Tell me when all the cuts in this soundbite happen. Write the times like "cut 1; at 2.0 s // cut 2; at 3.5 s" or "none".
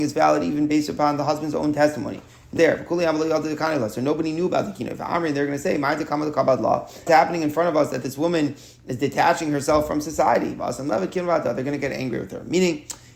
cut 1; at 2.6 s // cut 2; at 7.1 s